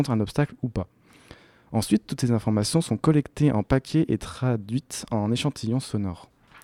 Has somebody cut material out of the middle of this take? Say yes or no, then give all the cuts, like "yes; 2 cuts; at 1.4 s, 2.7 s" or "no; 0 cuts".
no; 0 cuts